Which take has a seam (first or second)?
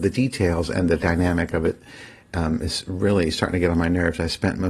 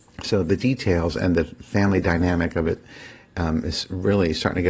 first